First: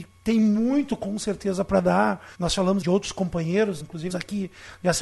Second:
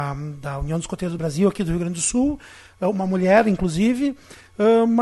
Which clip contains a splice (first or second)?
first